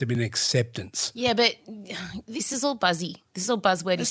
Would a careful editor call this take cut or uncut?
uncut